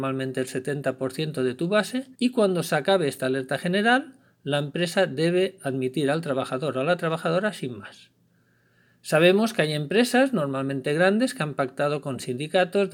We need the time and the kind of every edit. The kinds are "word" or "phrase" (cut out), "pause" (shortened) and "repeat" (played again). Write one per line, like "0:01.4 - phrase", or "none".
0:02.1 - pause